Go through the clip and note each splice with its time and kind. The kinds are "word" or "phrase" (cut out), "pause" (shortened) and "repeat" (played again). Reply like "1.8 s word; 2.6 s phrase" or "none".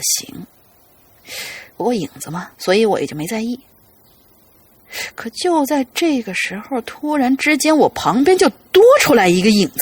2.5 s pause